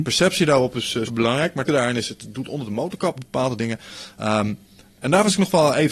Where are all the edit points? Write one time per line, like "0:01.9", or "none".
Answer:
0:01.1
0:01.7
0:03.2